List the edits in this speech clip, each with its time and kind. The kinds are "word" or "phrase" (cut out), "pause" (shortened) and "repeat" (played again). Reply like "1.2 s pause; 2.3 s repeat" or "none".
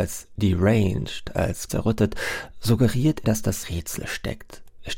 1.7 s word; 3.2 s word; 3.6 s phrase